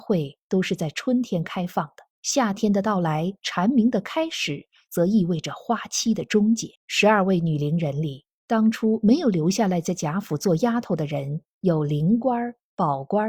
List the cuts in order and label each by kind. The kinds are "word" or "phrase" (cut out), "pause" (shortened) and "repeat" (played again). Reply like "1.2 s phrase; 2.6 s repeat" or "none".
2.1 s pause; 6.8 s pause